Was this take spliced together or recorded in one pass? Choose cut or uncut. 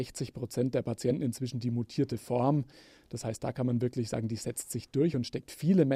uncut